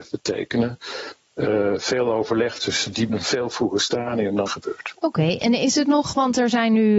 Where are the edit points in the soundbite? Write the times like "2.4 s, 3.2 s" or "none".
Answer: 3.1 s, 4.5 s